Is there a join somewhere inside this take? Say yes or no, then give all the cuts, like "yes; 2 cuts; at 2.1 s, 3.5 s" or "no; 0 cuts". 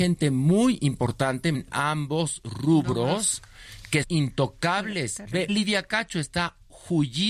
yes; 3 cuts; at 1.5 s, 4.0 s, 5.5 s